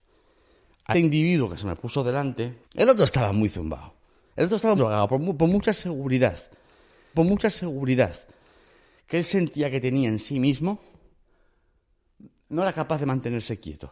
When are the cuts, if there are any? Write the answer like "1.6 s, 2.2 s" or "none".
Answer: 0.9 s, 2.6 s, 4.8 s, 7.1 s